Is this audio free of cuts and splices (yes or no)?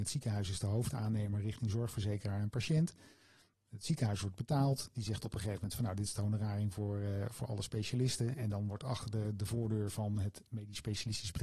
yes